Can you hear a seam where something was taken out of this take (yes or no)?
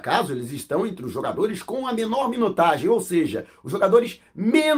no